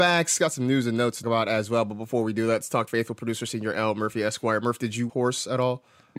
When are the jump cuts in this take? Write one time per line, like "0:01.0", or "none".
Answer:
0:01.2
0:02.9
0:03.7
0:05.1